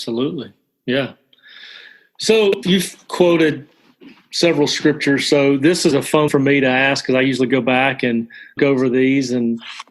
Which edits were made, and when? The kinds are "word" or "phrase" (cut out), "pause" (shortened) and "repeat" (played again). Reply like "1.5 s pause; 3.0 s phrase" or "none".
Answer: 2.6 s word; 5.9 s word; 6.3 s word; 8.6 s word